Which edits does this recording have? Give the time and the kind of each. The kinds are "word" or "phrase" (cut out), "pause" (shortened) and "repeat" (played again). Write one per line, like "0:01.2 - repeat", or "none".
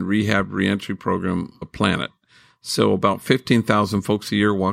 0:01.6 - word